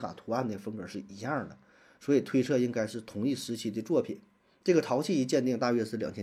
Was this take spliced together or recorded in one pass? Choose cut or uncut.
uncut